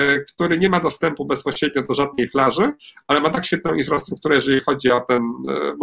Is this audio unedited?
yes; 0 cuts

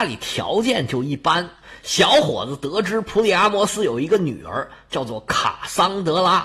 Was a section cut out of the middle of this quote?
no; 0 cuts

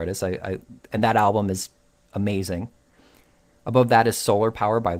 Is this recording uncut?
yes; 0 cuts

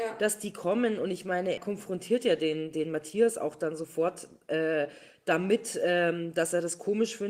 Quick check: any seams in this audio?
yes; 1 cut; at 1.6 s

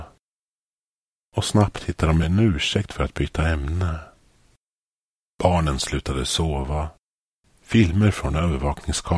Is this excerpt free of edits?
yes; 0 cuts

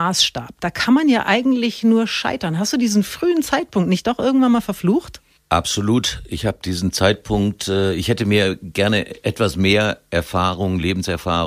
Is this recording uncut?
yes; 0 cuts

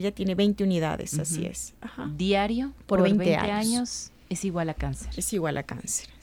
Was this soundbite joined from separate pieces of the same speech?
no; 0 cuts

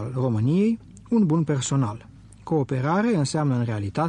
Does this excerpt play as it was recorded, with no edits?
yes; 0 cuts

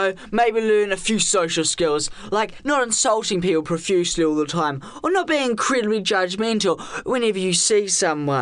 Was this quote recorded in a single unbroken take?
yes; 0 cuts

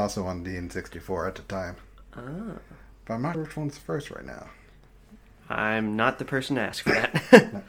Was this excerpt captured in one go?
no; 1 cut; at 3.3 s

